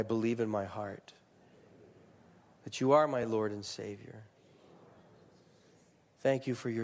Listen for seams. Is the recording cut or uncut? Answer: uncut